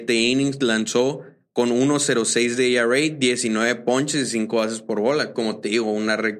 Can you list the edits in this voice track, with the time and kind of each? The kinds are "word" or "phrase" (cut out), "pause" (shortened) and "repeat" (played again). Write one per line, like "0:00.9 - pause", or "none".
none

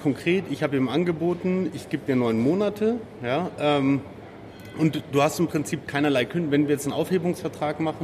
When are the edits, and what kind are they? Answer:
none

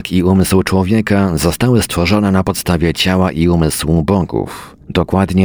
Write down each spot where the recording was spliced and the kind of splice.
none

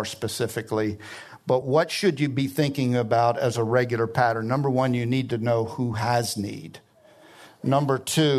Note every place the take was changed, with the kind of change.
none

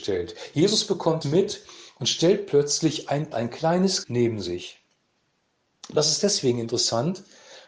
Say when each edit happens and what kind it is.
0:01.2 - word
0:03.3 - word
0:04.0 - word

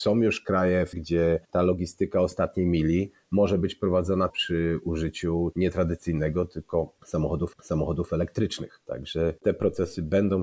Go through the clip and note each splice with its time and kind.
0:00.9 - word
0:01.4 - pause
0:04.3 - word
0:05.5 - word
0:07.5 - repeat
0:09.4 - pause

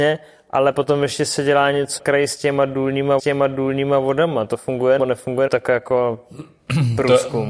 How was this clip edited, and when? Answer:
0:02.0 - word
0:03.2 - repeat
0:05.0 - word
0:05.5 - word

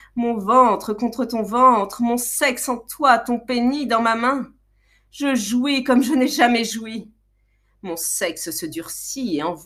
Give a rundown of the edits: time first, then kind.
none

